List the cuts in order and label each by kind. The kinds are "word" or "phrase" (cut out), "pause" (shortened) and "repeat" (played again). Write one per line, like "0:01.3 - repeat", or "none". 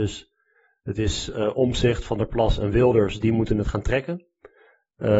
none